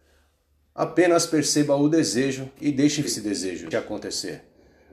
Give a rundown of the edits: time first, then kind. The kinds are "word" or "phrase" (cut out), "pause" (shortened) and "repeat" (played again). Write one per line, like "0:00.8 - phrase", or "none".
0:02.6 - pause
0:03.0 - word
0:03.7 - word